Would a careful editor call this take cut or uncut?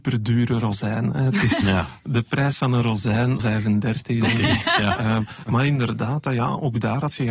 cut